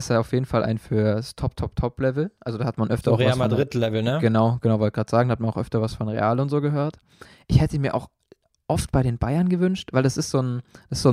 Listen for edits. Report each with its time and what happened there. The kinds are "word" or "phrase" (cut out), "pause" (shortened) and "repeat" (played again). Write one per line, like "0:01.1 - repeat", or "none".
none